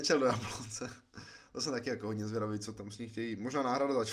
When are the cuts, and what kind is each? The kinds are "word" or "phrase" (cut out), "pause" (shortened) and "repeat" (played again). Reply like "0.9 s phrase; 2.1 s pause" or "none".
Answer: none